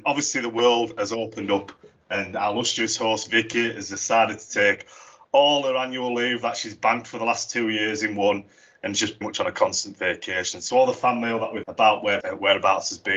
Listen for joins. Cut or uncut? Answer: cut